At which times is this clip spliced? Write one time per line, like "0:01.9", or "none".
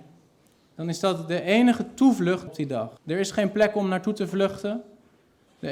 0:02.5
0:03.0

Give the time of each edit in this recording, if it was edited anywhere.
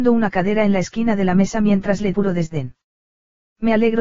0:02.1

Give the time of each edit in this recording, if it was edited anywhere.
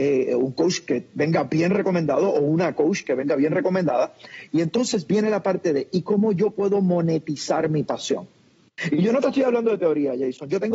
none

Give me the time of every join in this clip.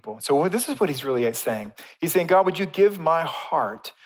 none

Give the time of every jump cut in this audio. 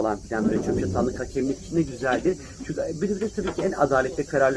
none

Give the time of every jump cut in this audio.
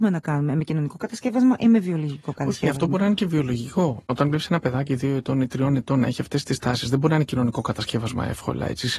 none

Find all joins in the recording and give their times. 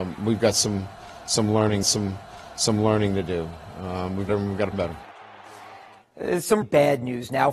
0:01.8
0:04.3
0:04.7
0:06.6

